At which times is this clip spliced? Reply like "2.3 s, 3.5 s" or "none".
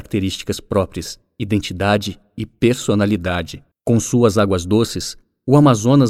3.7 s